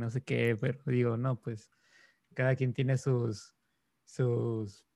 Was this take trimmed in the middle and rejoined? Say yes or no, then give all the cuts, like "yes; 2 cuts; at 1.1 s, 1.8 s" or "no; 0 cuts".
no; 0 cuts